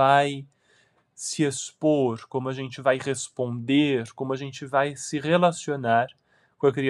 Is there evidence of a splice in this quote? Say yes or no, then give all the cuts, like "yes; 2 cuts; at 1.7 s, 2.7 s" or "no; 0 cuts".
no; 0 cuts